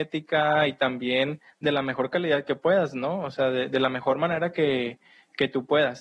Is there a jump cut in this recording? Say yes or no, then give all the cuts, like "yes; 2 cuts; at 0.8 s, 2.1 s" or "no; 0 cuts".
no; 0 cuts